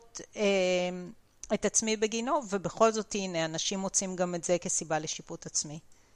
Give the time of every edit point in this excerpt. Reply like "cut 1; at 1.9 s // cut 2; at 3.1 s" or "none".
none